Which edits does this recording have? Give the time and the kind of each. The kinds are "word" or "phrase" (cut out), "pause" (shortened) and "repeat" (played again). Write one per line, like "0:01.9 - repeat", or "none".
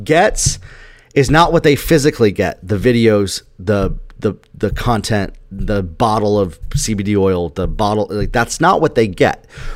none